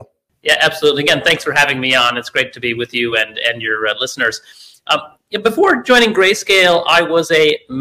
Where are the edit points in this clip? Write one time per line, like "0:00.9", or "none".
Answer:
none